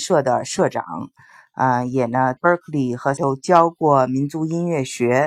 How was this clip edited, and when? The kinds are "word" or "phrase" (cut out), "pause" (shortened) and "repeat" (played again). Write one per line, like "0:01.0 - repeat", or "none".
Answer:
0:02.4 - word
0:03.2 - word

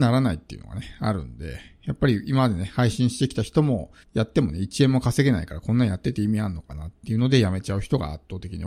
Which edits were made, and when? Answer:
0:04.0 - pause

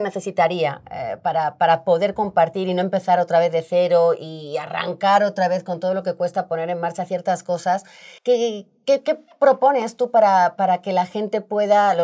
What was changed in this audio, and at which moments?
0:08.2 - pause

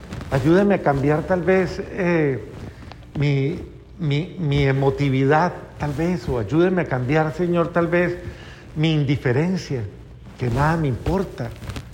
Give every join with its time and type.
none

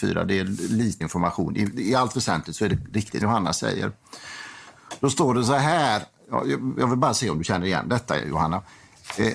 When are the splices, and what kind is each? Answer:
0:01.0 - word
0:03.2 - word

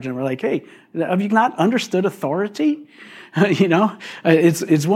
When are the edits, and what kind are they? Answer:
0:01.3 - word

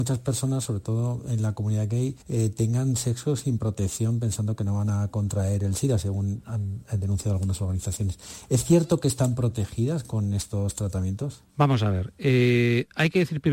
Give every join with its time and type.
0:02.2 - pause
0:11.5 - pause

